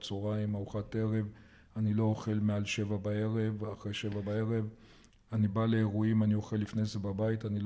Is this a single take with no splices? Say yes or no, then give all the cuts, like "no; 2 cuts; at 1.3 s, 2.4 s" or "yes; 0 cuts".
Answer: yes; 0 cuts